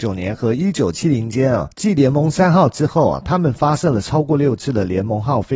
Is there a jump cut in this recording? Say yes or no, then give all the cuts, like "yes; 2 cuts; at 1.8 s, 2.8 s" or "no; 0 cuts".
yes; 1 cut; at 1.7 s